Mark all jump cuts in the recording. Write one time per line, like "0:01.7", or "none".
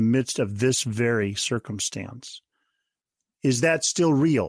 none